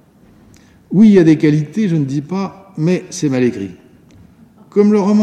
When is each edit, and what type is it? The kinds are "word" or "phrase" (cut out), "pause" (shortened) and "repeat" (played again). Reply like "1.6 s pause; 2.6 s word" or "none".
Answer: none